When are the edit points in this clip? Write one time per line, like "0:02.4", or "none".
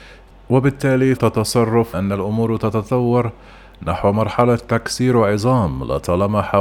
0:01.2
0:01.9